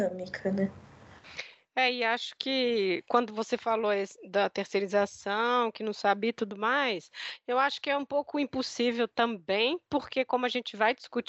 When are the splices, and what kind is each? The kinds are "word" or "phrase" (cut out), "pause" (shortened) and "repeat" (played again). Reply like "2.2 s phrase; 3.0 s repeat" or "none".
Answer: none